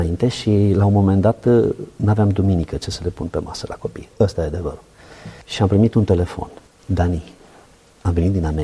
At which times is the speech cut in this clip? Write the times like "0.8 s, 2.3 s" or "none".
5.4 s, 6.7 s